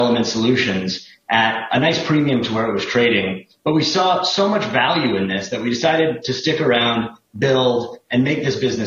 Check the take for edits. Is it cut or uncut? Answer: uncut